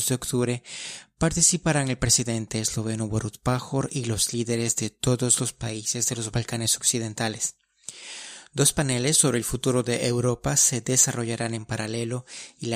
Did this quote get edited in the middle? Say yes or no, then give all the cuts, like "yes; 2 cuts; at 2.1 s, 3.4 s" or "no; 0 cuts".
no; 0 cuts